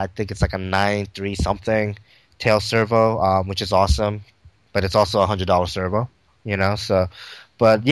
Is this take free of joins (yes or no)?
yes